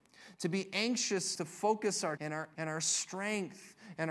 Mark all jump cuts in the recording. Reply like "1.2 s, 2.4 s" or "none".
1.3 s, 2.2 s, 2.5 s